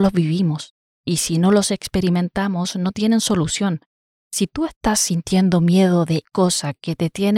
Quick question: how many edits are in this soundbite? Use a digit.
1